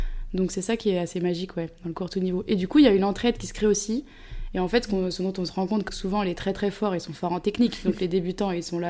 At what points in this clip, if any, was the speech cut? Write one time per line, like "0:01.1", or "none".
0:05.9